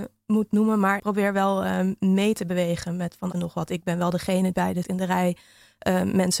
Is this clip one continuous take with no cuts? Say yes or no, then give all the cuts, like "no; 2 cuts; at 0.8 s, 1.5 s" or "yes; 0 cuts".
no; 4 cuts; at 1.0 s, 3.3 s, 4.5 s, 4.8 s